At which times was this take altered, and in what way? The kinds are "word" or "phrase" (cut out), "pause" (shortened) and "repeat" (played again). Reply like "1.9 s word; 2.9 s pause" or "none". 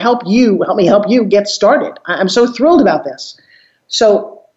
none